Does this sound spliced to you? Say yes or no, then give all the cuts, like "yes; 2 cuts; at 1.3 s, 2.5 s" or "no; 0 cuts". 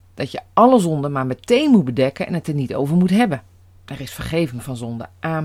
no; 0 cuts